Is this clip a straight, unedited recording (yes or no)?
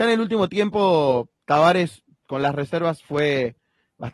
no